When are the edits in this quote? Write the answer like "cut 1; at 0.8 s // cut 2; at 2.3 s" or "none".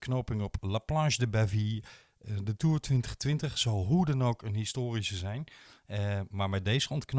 none